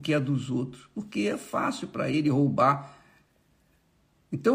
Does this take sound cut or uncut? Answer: uncut